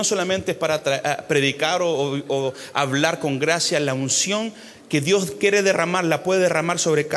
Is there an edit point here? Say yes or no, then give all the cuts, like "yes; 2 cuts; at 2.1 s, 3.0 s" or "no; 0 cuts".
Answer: no; 0 cuts